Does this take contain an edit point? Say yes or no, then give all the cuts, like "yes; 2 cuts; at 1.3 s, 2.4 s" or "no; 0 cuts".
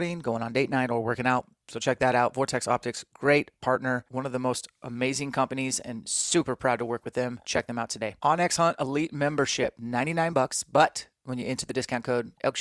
no; 0 cuts